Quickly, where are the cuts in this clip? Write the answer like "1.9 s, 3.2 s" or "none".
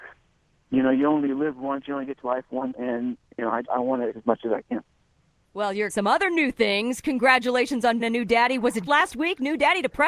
2.2 s, 2.7 s, 3.6 s, 4.1 s, 5.9 s, 8.0 s, 8.9 s